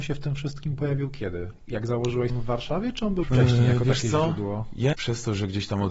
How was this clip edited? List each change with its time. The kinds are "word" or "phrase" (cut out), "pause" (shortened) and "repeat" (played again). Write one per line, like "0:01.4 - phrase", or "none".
0:02.3 - word
0:03.2 - word
0:04.9 - word